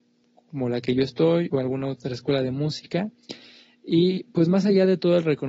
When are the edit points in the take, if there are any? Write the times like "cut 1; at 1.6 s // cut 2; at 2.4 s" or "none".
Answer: none